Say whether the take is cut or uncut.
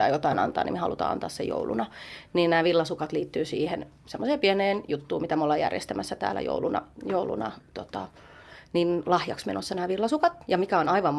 uncut